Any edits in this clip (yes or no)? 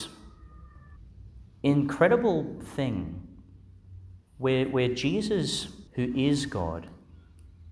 yes